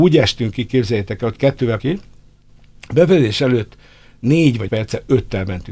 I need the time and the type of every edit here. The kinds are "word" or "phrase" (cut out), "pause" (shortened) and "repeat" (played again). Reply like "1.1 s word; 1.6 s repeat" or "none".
1.8 s word; 4.7 s word